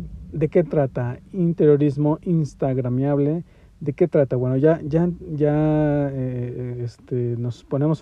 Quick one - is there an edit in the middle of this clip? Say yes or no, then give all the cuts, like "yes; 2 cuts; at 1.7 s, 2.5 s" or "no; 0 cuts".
no; 0 cuts